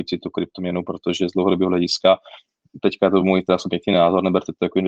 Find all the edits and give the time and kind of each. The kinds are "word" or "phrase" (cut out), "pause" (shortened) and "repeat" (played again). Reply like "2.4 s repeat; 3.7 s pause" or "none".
none